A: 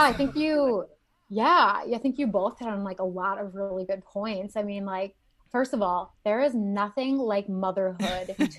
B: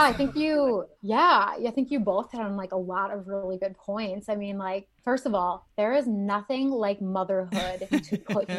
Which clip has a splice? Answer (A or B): B